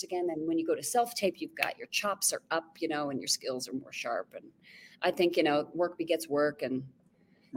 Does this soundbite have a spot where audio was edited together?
no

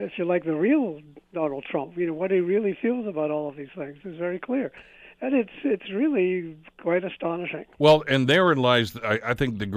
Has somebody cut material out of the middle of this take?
yes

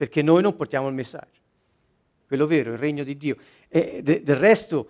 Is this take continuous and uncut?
yes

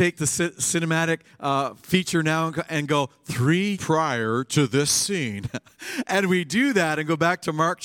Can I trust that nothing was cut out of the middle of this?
no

